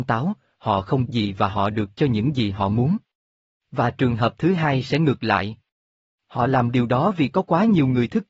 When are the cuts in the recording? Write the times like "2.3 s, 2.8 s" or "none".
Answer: 1.1 s